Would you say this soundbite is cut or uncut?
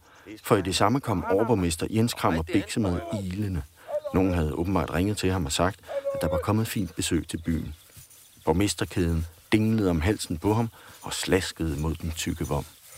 uncut